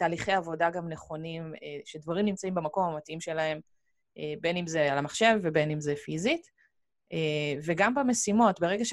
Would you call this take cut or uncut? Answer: uncut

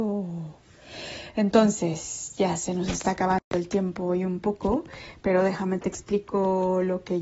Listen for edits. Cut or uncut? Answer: uncut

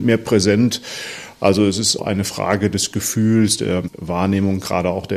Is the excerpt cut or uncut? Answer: cut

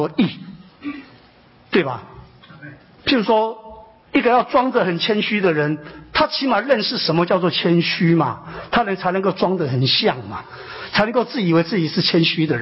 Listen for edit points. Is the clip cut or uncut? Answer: uncut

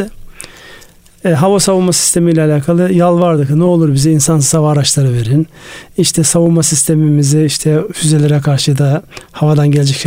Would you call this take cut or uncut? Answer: uncut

